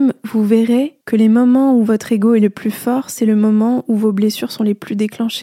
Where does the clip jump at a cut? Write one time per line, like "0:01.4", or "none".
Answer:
0:01.0